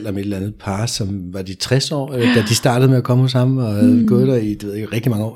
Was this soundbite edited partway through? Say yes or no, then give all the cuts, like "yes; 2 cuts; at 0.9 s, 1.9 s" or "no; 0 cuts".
no; 0 cuts